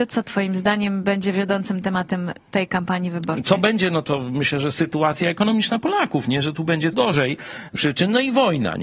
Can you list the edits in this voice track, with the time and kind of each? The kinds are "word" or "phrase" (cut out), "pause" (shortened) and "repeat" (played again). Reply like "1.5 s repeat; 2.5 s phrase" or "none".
4.0 s word; 6.9 s word; 7.8 s word